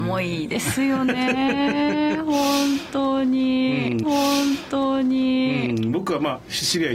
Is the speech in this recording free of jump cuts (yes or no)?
no